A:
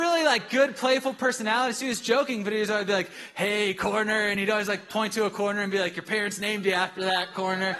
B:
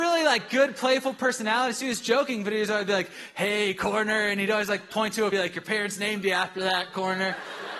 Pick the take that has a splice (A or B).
B